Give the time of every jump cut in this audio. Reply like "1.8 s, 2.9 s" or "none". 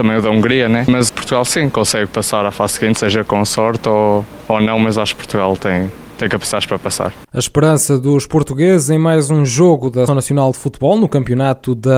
1.1 s, 7.3 s, 10.1 s